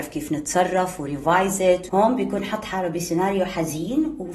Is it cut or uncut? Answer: cut